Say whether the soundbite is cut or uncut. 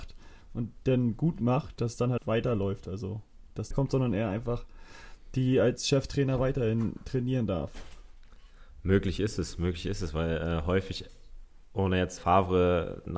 cut